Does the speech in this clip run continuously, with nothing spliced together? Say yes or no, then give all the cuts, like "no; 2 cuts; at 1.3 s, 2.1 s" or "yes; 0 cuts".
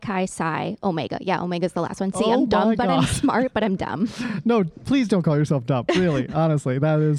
yes; 0 cuts